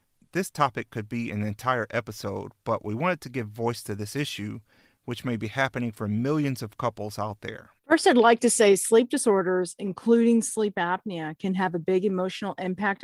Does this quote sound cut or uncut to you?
cut